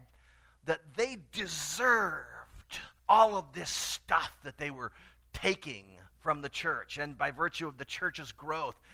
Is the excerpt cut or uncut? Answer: cut